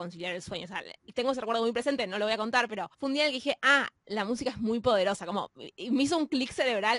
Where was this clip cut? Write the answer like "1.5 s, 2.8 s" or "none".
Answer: 2.9 s